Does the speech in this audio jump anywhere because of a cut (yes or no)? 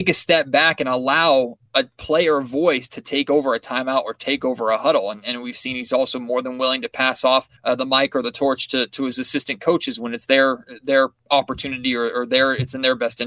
yes